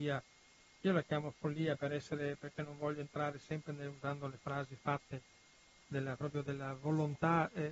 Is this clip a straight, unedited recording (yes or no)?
yes